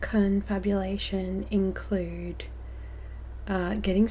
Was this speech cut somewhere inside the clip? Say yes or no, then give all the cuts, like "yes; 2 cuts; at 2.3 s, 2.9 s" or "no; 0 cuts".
no; 0 cuts